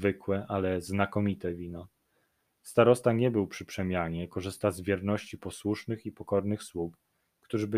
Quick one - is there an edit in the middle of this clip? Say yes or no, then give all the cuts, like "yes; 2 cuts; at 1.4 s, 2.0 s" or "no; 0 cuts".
no; 0 cuts